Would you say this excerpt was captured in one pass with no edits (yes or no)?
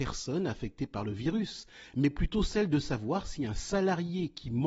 yes